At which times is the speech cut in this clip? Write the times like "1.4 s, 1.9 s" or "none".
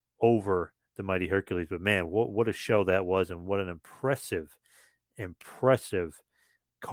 none